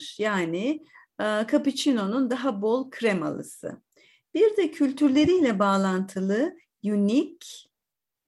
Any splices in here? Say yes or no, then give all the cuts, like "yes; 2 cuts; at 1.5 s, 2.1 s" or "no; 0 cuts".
no; 0 cuts